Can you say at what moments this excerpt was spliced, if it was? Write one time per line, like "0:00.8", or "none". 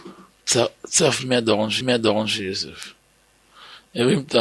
0:01.8